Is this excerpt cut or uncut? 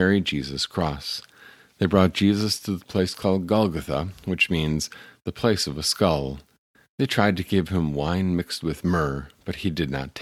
uncut